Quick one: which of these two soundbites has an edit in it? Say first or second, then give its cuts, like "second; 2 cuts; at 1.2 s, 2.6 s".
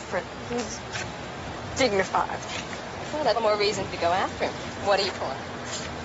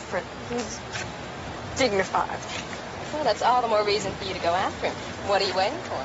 first; 3 cuts; at 3.3 s, 3.9 s, 5.1 s